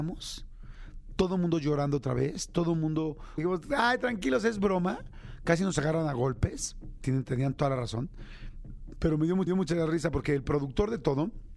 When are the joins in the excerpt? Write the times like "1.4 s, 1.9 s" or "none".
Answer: 3.4 s, 9.5 s

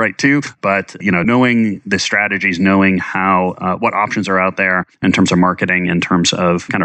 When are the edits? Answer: 4.9 s

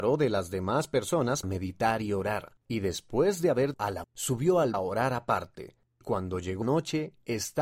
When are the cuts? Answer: 1.4 s, 2.6 s, 3.7 s, 4.0 s, 4.7 s, 6.0 s, 6.6 s

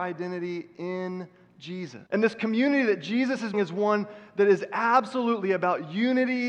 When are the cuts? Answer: 2.1 s, 3.5 s

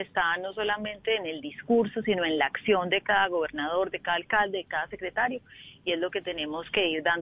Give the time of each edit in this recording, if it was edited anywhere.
none

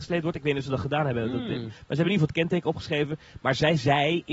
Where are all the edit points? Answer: none

